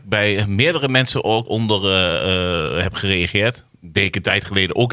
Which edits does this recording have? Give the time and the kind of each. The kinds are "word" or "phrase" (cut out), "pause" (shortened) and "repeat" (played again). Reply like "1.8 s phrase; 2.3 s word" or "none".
1.4 s phrase; 3.7 s pause